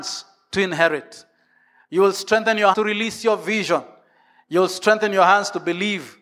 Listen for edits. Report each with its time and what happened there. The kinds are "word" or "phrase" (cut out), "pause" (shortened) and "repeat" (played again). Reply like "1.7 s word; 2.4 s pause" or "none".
2.7 s word